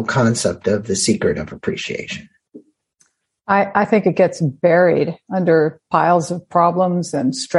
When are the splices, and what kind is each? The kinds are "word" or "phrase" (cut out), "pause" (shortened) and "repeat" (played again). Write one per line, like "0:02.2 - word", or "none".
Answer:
none